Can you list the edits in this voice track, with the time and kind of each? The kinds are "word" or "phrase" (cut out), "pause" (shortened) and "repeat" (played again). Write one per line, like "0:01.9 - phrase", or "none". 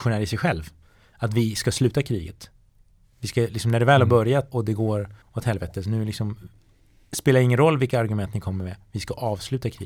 0:04.5 - word
0:05.2 - pause